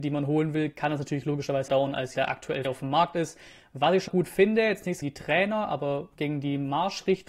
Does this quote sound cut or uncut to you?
cut